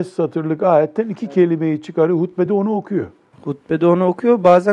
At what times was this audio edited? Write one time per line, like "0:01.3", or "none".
none